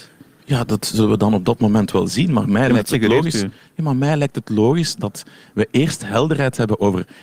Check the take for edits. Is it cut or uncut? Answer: uncut